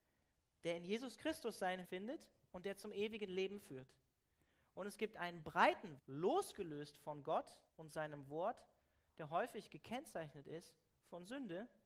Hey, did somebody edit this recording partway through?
yes; 3 cuts; at 1.8 s, 6.0 s, 7.7 s

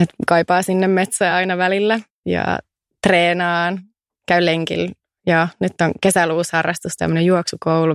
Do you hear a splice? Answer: no; 0 cuts

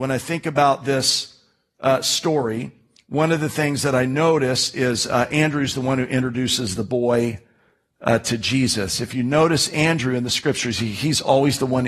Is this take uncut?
yes; 0 cuts

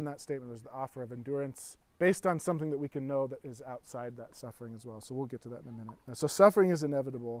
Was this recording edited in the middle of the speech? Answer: yes; 2 cuts; at 1.9 s, 6.0 s

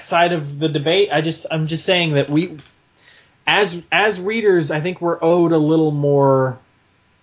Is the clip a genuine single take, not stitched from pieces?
yes; 0 cuts

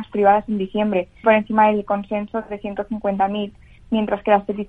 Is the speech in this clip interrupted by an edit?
yes; 1 cut; at 1.2 s

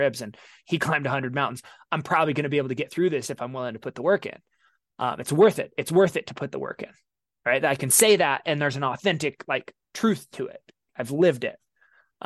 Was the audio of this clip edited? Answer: no; 0 cuts

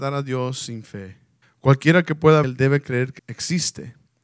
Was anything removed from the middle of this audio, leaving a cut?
yes; 3 cuts; at 1.4 s, 2.4 s, 3.2 s

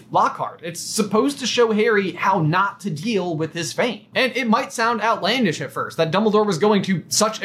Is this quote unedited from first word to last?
yes; 0 cuts

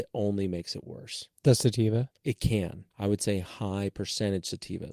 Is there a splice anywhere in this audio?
yes; 3 cuts; at 1.3 s, 2.2 s, 2.9 s

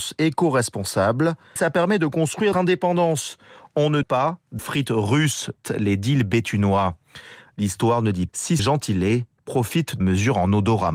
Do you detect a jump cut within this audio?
yes; 8 cuts; at 1.6 s, 2.5 s, 4.0 s, 4.6 s, 5.6 s, 8.3 s, 8.6 s, 10.0 s

